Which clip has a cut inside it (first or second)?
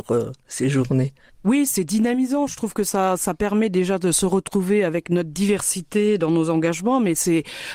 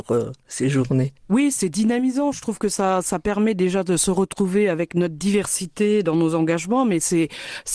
second